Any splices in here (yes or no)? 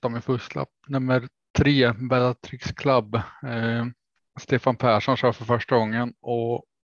no